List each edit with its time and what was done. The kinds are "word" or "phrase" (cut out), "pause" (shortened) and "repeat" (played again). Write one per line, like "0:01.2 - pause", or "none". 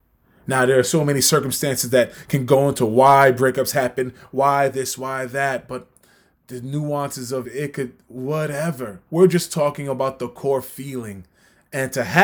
0:07.4 - word
0:09.1 - pause